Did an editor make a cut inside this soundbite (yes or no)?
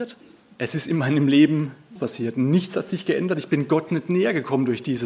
yes